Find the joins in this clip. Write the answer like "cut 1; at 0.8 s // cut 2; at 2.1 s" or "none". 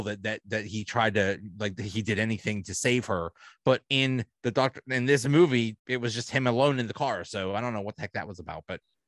cut 1; at 5.8 s